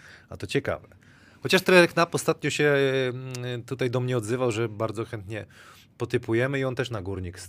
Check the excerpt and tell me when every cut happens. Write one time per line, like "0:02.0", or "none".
none